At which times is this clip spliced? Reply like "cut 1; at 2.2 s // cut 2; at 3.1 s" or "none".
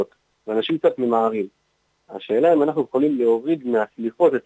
none